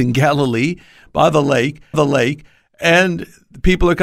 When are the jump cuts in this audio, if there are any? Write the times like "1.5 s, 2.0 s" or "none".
1.9 s

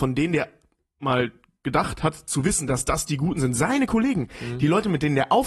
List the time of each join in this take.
none

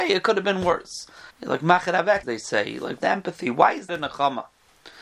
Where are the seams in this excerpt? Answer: 1.3 s, 2.2 s, 3.0 s, 3.9 s

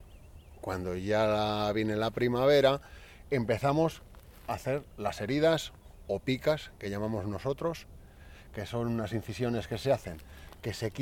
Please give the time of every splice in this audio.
none

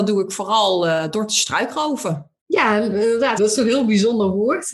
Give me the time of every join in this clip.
2.4 s, 3.4 s

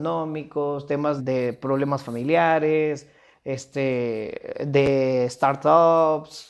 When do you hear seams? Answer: 1.2 s

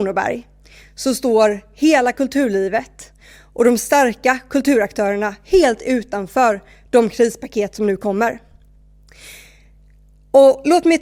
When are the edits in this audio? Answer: none

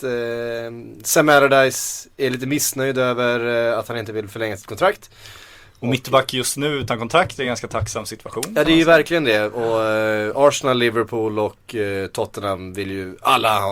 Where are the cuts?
none

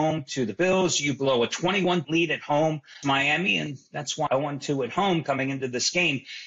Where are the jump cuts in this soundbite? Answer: 2.0 s, 3.0 s, 4.3 s

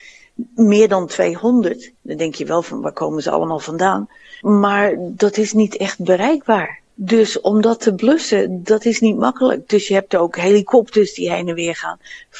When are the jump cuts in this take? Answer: 2.0 s, 4.4 s, 6.9 s

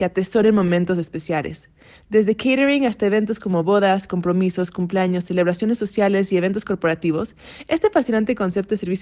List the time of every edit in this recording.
none

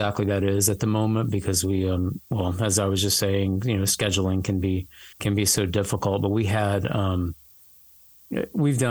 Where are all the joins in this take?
2.3 s, 5.1 s

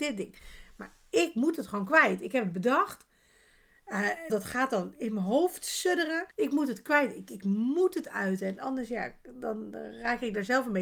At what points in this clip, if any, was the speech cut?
4.3 s, 6.3 s

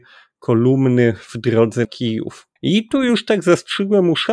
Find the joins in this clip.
1.8 s, 2.6 s

